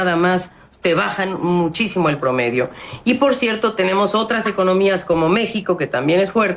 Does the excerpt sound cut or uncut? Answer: uncut